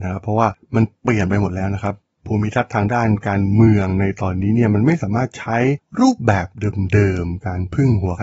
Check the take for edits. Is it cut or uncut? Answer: uncut